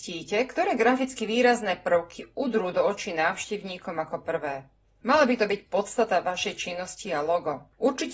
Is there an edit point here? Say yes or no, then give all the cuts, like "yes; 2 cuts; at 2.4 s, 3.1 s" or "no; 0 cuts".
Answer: yes; 1 cut; at 4.8 s